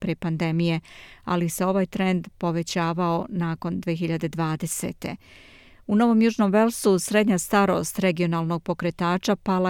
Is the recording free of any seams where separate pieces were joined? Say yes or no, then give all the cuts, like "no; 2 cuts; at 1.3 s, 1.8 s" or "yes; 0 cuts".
yes; 0 cuts